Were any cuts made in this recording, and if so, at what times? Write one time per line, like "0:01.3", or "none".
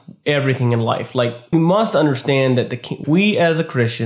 0:01.5
0:03.0